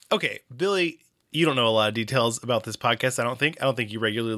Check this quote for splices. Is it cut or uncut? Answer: uncut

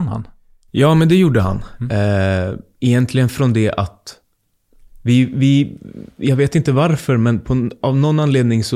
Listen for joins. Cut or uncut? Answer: uncut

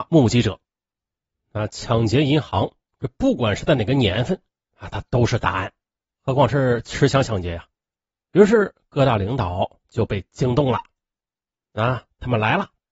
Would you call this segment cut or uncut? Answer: uncut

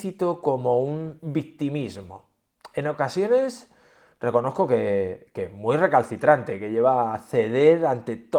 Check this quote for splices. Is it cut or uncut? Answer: uncut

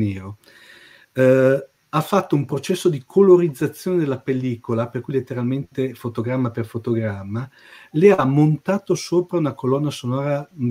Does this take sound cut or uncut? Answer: uncut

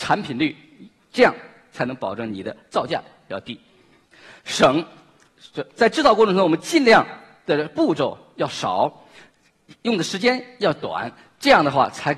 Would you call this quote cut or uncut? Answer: uncut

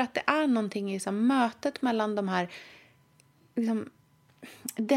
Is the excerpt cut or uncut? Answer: uncut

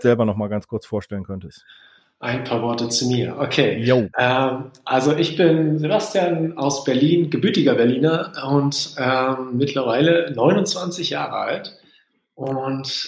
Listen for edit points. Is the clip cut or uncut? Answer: uncut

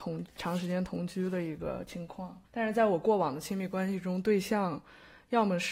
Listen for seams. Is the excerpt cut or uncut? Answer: cut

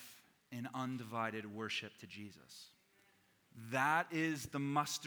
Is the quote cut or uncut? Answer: uncut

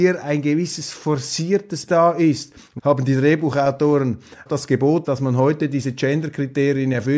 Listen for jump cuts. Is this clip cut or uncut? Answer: cut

